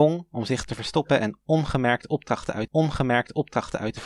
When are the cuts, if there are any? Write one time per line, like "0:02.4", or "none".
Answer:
0:02.7